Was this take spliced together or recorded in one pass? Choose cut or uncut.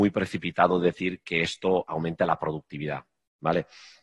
uncut